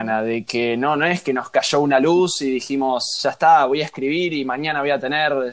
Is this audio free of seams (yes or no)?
yes